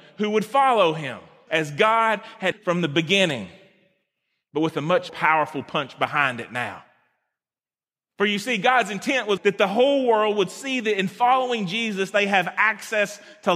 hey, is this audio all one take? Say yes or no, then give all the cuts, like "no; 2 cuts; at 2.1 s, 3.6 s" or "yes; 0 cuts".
no; 4 cuts; at 1.5 s, 2.5 s, 5.1 s, 9.4 s